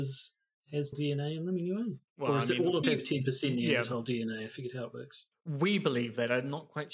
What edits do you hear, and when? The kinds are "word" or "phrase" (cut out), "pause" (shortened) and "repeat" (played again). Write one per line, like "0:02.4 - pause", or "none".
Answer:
0:00.9 - word
0:02.1 - pause
0:02.8 - word